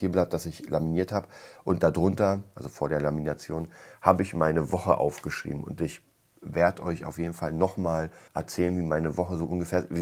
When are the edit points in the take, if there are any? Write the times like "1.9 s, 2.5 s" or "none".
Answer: 8.3 s